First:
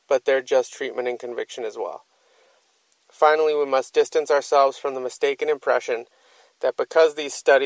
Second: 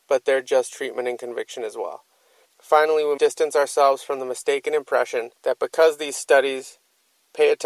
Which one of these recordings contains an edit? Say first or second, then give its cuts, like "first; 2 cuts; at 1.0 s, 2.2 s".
second; 3 cuts; at 2.4 s, 3.2 s, 5.4 s